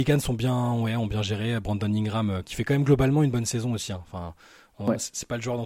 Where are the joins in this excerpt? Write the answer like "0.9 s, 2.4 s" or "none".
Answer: 2.4 s